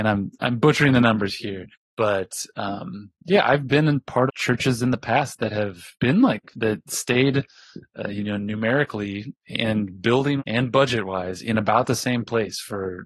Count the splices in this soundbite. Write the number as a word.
six